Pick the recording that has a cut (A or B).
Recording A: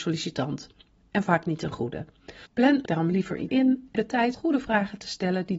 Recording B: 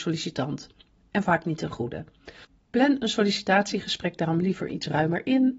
A